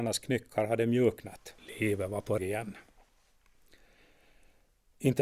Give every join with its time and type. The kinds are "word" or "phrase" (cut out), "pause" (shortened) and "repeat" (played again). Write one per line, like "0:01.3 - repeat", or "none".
0:01.6 - pause
0:02.4 - phrase